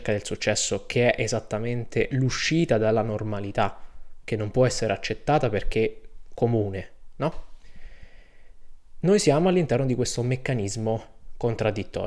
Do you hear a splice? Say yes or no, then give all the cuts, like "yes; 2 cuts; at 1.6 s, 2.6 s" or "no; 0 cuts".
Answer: no; 0 cuts